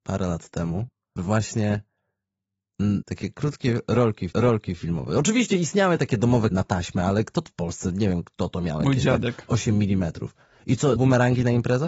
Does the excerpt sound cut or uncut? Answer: cut